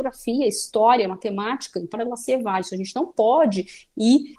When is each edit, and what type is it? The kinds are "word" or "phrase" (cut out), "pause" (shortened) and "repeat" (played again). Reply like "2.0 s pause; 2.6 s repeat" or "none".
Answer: 1.9 s word